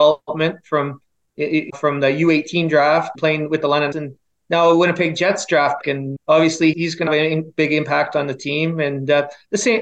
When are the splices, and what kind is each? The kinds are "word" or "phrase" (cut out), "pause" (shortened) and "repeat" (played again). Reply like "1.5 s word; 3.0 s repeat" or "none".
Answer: 1.7 s word; 3.1 s word; 3.9 s word; 5.8 s word; 6.2 s word; 6.7 s word; 7.1 s word